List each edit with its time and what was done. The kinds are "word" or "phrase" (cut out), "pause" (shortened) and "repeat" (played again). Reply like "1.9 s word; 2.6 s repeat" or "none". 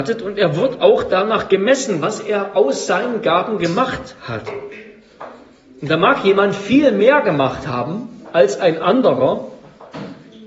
none